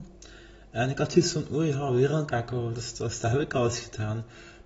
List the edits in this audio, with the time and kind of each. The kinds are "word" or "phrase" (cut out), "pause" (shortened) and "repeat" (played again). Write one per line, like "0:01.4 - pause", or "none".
none

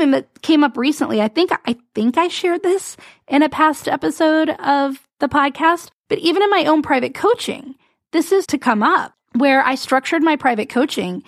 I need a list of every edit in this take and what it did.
0:08.4 - word

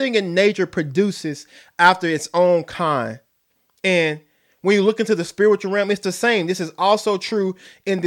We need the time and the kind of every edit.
none

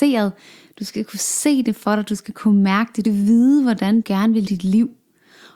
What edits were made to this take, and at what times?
0:03.0 - word
0:04.0 - word
0:04.5 - word

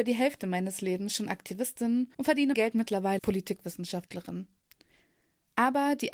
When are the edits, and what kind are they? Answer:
0:02.1 - pause
0:02.5 - word
0:03.2 - word

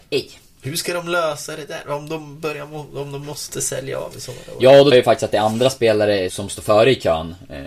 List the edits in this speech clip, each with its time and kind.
0:04.9 - phrase
0:06.3 - word

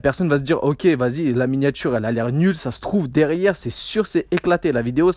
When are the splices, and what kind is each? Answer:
none

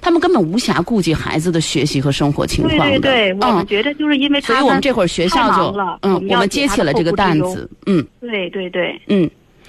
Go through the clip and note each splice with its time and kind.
0:08.1 - pause

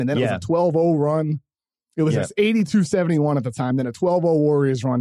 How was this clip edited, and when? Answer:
none

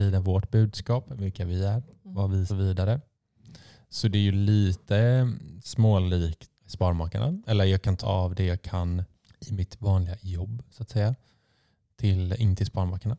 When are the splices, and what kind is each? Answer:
0:02.5 - phrase
0:04.8 - pause
0:06.6 - word
0:08.0 - word
0:09.1 - pause

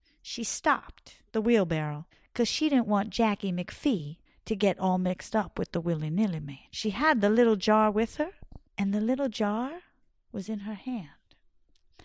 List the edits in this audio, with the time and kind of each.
0:01.3 - pause
0:02.1 - pause
0:04.3 - pause
0:06.7 - pause
0:08.7 - pause
0:10.1 - pause

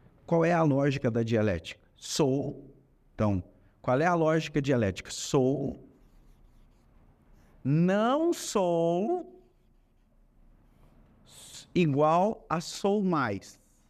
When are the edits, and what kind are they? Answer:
none

